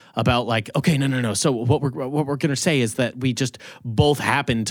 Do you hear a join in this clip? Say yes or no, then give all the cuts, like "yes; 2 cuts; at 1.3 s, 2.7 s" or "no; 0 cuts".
no; 0 cuts